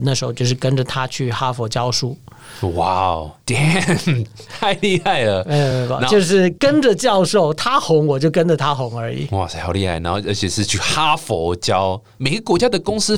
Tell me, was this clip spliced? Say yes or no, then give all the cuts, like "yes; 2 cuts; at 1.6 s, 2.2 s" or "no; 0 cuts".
no; 0 cuts